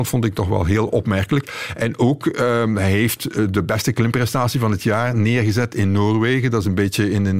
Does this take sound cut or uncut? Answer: uncut